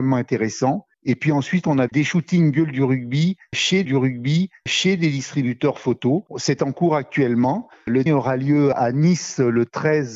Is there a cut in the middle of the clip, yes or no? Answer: yes